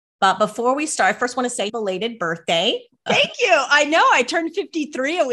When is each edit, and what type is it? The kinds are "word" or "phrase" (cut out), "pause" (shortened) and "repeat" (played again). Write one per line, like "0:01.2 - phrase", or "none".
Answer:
0:01.7 - word
0:03.1 - word